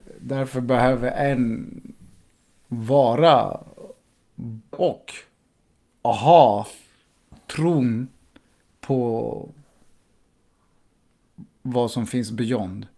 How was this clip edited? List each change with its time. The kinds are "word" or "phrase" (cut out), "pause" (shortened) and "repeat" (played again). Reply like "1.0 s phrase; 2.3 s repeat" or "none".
4.7 s word